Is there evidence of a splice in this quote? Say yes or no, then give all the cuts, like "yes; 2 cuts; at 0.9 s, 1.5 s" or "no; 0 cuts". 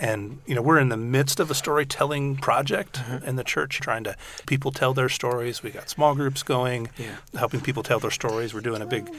yes; 2 cuts; at 3.8 s, 4.4 s